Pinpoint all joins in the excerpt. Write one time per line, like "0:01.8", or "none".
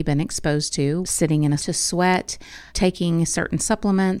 0:01.0
0:01.6
0:02.7